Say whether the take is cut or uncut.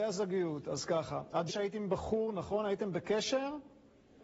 cut